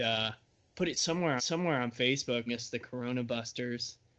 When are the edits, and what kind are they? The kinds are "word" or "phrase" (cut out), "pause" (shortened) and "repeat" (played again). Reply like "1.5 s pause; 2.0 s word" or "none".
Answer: 1.4 s repeat; 2.5 s word